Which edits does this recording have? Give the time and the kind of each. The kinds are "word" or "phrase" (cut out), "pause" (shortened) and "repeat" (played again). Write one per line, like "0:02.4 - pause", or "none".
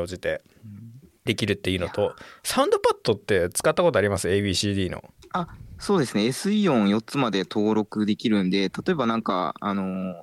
none